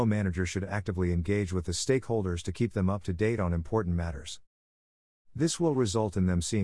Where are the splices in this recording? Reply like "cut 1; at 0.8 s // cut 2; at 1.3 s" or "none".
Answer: none